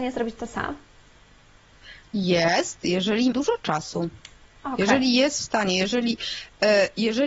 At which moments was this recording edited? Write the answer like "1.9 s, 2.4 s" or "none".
3.3 s

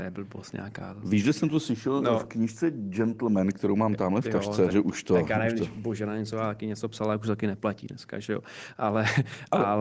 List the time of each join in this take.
4.7 s

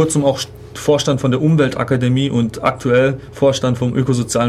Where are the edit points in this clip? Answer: none

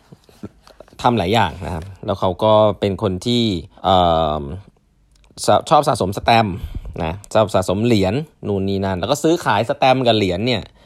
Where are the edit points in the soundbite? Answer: 3.8 s

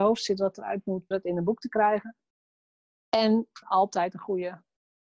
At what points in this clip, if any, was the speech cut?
1.1 s, 3.6 s

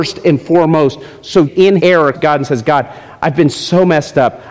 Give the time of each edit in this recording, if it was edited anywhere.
1.5 s, 1.8 s, 2.1 s

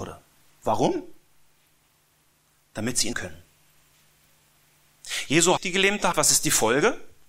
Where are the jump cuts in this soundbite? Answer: 3.1 s, 5.6 s, 6.1 s

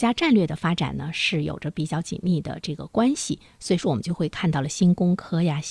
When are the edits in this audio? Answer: none

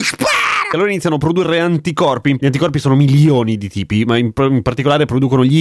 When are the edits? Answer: 2.4 s

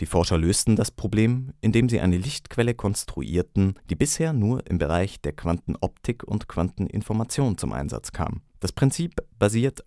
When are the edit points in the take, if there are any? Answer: 3.8 s, 8.5 s

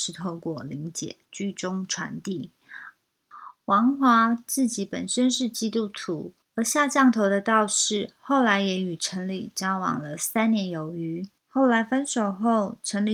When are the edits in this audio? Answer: 1.2 s, 6.4 s, 11.4 s

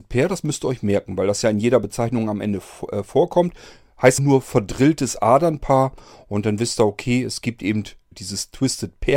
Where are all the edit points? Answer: 4.2 s, 8.1 s

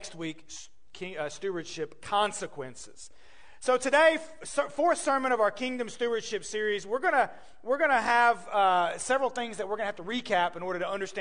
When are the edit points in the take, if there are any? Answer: none

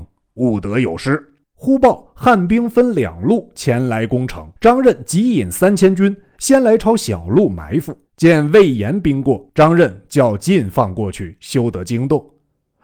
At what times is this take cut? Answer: 1.4 s, 4.6 s, 8.1 s, 9.5 s

